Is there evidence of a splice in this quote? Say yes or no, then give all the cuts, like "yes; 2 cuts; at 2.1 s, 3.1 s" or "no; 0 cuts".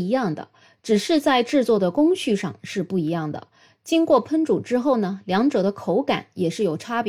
no; 0 cuts